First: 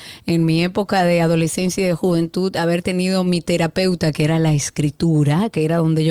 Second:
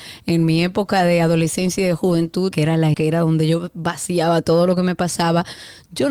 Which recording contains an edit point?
second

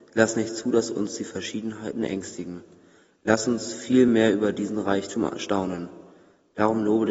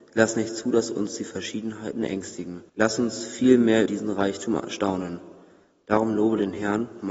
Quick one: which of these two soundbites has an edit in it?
second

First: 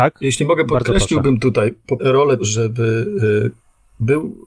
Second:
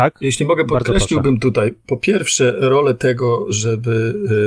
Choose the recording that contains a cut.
first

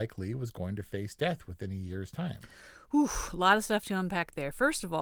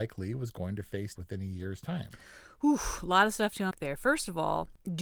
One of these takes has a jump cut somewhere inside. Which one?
second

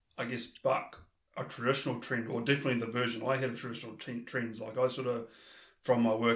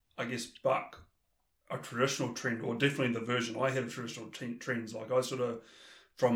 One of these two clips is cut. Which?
first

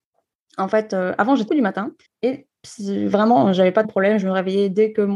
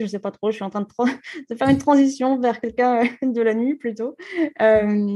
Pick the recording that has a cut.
first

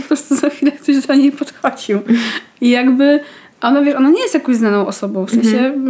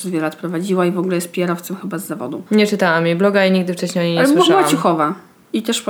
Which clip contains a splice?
second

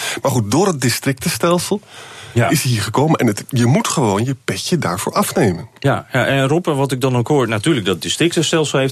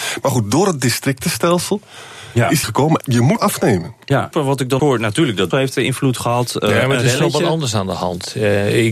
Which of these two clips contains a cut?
second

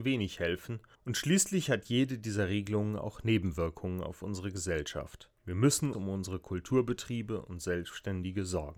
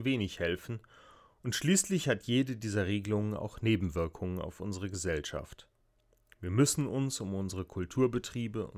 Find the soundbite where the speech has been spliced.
first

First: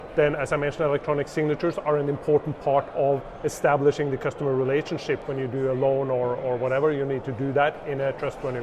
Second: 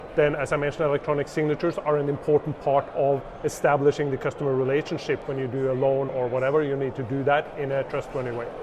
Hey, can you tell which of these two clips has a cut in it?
second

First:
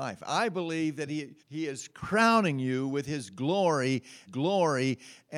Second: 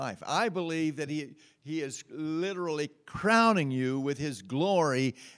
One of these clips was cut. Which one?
first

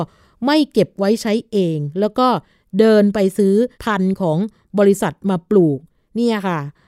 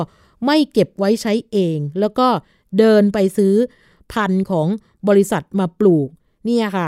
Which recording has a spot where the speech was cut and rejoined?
first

